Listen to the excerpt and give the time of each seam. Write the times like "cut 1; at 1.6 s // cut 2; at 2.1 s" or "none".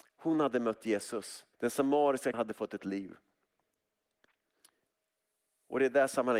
cut 1; at 1.5 s // cut 2; at 2.3 s // cut 3; at 2.8 s